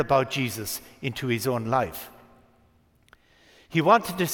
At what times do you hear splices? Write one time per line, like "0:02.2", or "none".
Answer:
none